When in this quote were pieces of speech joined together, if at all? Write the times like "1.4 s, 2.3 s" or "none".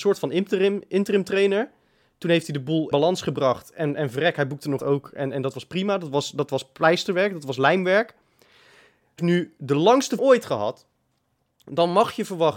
2.9 s, 4.8 s, 9.2 s, 10.2 s